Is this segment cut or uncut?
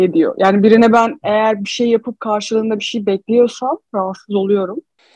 uncut